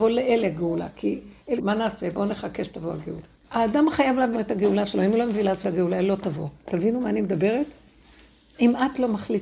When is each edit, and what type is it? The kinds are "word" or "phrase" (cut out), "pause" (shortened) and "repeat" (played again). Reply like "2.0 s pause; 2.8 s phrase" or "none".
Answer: 1.6 s phrase; 3.4 s pause; 4.3 s word; 5.6 s word